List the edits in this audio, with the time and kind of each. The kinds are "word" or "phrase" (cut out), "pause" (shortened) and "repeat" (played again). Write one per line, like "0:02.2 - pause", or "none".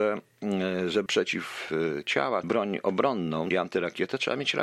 0:01.1 - word
0:02.4 - phrase
0:03.5 - word